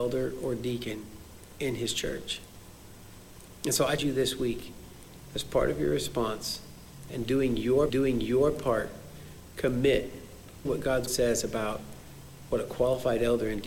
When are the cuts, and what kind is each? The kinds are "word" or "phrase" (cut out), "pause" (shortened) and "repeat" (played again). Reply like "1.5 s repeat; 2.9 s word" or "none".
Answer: 4.0 s word; 7.9 s repeat; 10.7 s phrase; 11.1 s word